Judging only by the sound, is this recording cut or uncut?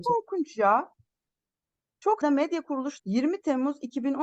cut